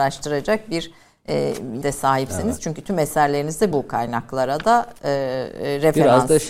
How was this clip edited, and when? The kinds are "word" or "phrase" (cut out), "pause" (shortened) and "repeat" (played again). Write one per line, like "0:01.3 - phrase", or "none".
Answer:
0:01.8 - word
0:03.7 - word